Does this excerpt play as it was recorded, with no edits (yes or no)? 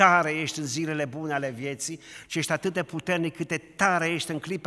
yes